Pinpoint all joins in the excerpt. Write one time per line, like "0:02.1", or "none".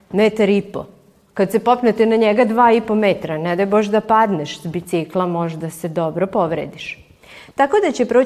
none